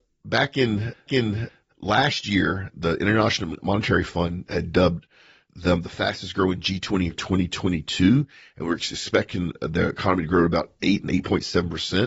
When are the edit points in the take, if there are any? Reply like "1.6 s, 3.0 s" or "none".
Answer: 1.1 s, 7.1 s, 11.1 s